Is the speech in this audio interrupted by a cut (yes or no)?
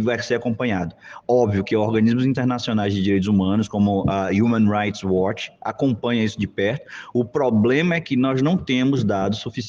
no